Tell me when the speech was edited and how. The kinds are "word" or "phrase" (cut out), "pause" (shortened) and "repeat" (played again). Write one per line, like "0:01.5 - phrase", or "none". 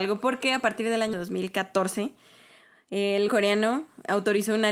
0:01.1 - word
0:03.3 - word